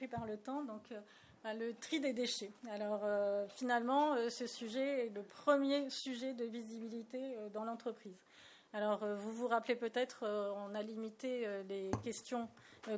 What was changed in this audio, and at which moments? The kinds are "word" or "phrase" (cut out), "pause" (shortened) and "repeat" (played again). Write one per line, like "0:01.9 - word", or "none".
none